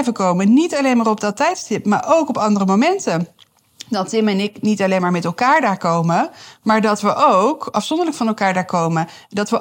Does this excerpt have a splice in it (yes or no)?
no